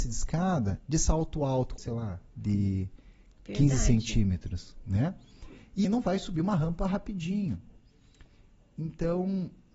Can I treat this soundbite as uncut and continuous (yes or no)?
no